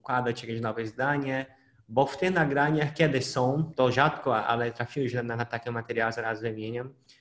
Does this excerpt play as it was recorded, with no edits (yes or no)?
yes